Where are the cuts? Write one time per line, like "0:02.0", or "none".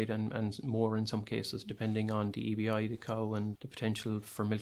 0:03.5